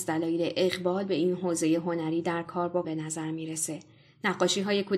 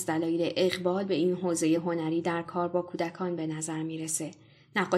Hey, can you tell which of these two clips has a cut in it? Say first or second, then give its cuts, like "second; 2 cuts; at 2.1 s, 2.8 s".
first; 1 cut; at 2.8 s